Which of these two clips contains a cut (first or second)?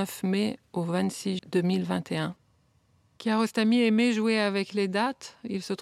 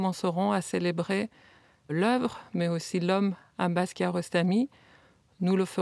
first